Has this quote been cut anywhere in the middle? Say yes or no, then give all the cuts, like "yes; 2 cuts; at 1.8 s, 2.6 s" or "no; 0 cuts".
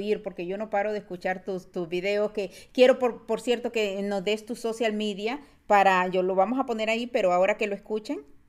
no; 0 cuts